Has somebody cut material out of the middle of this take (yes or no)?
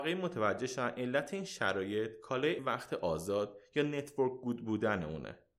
yes